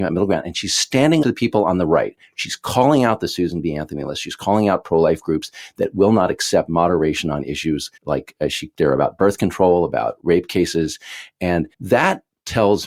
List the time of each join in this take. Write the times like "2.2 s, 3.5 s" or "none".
1.2 s, 8.0 s, 8.8 s, 11.7 s